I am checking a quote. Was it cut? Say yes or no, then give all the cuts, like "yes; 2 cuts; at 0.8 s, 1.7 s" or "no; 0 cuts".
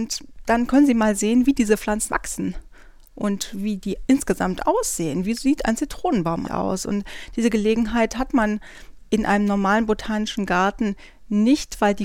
yes; 2 cuts; at 2.1 s, 6.4 s